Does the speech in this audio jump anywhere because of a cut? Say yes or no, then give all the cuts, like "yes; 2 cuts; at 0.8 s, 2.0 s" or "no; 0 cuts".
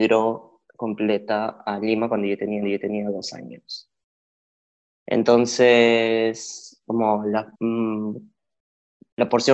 yes; 2 cuts; at 2.6 s, 7.5 s